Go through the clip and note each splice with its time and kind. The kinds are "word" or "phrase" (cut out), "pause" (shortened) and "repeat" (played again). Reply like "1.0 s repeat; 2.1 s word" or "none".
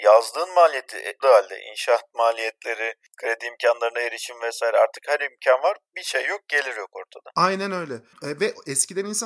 1.2 s phrase